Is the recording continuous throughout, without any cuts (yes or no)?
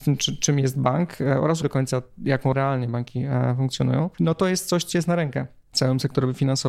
no